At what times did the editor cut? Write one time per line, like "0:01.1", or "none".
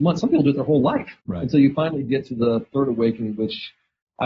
0:01.2